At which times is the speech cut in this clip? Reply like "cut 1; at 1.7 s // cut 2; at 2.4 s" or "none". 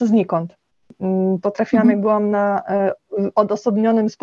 none